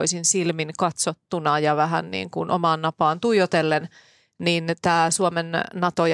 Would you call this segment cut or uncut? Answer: uncut